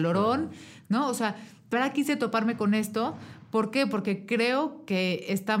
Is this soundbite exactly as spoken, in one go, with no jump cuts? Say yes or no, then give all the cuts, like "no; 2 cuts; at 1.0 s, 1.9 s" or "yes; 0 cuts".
no; 1 cut; at 1.7 s